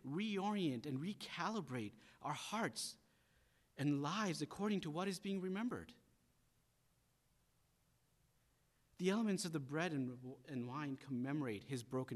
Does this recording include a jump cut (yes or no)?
no